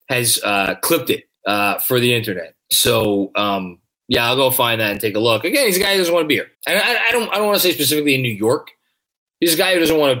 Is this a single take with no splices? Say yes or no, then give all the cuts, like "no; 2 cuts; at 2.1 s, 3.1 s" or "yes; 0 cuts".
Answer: no; 3 cuts; at 1.3 s, 2.6 s, 6.5 s